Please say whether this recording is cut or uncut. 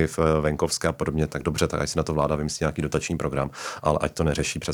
uncut